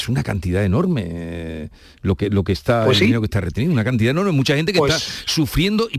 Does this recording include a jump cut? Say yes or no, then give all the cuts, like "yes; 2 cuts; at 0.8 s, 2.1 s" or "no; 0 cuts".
no; 0 cuts